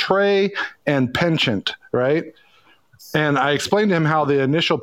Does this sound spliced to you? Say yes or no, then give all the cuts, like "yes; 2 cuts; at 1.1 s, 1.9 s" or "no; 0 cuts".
no; 0 cuts